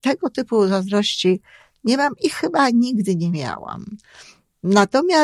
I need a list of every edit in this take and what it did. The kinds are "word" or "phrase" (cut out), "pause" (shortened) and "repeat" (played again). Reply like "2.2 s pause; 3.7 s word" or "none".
none